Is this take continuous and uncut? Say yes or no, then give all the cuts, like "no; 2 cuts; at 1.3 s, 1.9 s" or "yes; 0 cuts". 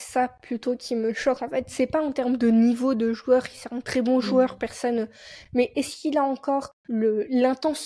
no; 1 cut; at 6.8 s